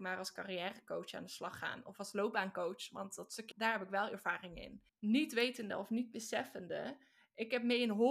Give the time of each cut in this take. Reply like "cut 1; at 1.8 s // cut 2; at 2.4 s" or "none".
cut 1; at 3.5 s // cut 2; at 4.9 s